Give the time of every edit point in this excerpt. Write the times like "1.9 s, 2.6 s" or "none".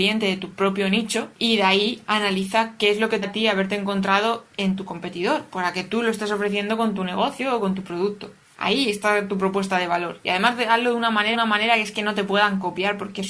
1.3 s, 3.2 s, 8.4 s, 11.3 s

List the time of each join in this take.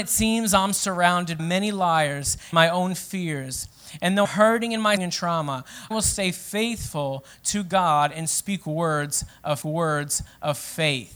1.4 s, 2.5 s, 4.2 s, 5.0 s, 5.9 s, 9.6 s

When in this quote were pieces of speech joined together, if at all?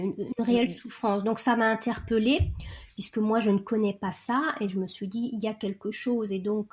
none

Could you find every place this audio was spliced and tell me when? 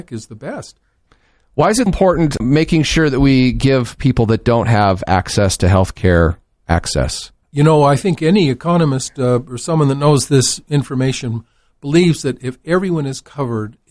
1.9 s, 2.4 s, 7.4 s

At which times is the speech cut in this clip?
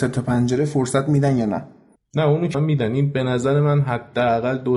2.0 s, 2.5 s

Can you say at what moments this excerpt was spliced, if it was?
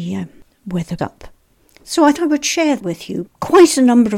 1.0 s, 2.1 s, 2.8 s, 3.3 s

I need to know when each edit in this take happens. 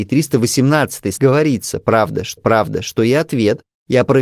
1.2 s, 2.4 s

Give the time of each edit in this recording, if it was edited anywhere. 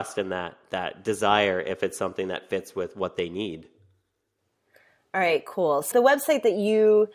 5.9 s

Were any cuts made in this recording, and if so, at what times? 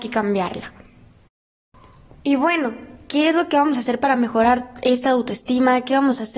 none

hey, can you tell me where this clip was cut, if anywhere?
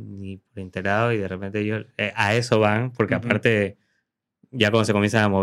none

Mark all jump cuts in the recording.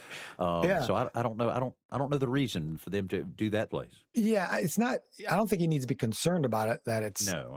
2.8 s, 3.7 s

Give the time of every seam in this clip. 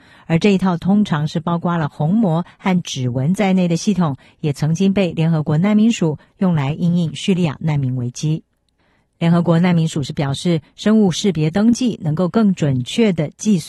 none

